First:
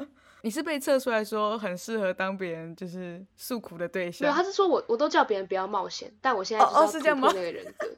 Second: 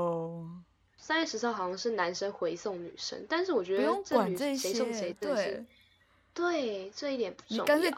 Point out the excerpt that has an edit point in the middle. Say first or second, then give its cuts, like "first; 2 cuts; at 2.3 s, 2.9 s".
first; 1 cut; at 3.3 s